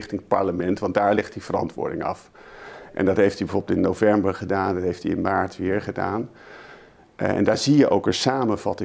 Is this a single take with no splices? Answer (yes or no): yes